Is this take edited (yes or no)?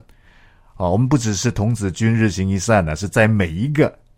no